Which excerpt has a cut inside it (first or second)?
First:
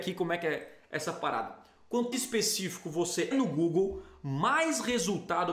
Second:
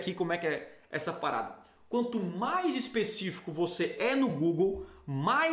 first